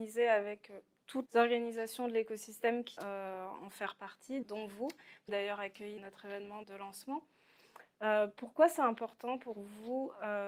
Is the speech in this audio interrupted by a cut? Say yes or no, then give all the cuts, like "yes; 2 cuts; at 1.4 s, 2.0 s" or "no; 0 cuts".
yes; 6 cuts; at 1.3 s, 3.0 s, 4.4 s, 5.3 s, 6.0 s, 6.6 s